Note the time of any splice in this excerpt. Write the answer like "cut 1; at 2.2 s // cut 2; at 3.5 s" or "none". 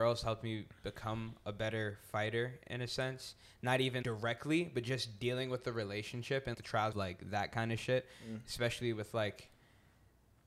cut 1; at 4.0 s // cut 2; at 6.5 s // cut 3; at 6.9 s